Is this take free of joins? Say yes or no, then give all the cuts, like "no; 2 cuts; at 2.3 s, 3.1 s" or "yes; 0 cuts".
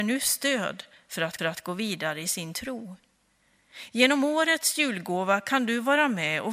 no; 1 cut; at 1.4 s